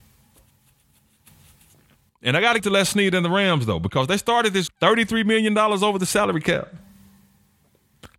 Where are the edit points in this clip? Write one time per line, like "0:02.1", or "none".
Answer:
0:02.6
0:04.7